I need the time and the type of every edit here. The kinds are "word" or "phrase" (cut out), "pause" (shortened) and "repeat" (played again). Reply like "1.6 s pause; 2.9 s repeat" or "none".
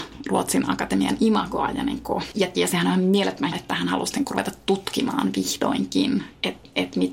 2.5 s word; 3.5 s word